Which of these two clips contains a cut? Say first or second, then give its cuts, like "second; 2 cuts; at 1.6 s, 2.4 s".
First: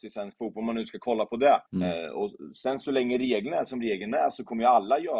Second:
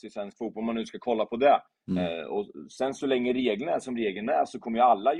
first; 1 cut; at 1.7 s